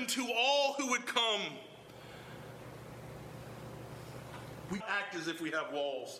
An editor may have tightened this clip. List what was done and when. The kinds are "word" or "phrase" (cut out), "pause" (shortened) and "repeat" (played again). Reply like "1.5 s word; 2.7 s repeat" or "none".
4.8 s word